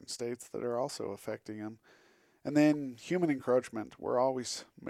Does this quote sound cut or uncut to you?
uncut